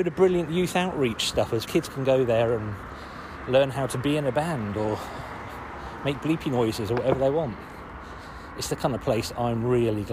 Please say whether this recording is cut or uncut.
cut